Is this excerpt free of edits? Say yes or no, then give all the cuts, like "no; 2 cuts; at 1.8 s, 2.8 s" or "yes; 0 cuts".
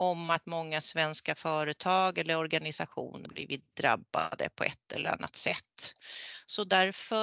no; 1 cut; at 3.3 s